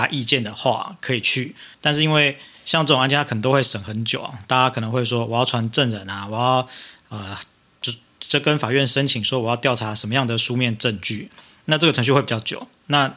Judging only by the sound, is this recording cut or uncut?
cut